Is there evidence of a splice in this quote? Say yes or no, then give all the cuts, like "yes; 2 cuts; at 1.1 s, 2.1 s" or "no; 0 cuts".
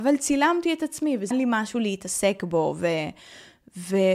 yes; 1 cut; at 1.3 s